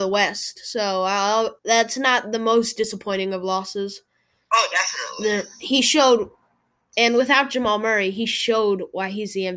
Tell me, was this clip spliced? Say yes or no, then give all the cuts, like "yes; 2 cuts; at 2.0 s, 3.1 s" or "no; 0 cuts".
yes; 1 cut; at 1.6 s